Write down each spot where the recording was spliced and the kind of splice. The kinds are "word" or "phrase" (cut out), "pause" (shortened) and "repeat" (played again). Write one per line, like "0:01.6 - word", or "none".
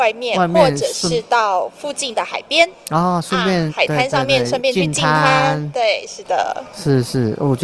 0:03.7 - word